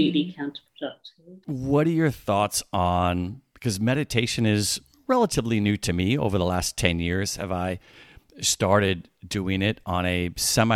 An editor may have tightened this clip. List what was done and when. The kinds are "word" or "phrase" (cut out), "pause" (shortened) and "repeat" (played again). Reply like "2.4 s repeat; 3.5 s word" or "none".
1.4 s pause